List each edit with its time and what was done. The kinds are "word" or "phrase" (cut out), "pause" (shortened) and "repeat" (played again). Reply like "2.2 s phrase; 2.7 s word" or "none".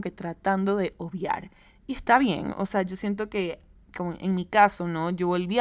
none